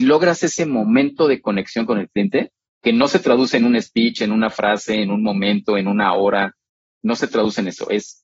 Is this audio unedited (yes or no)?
yes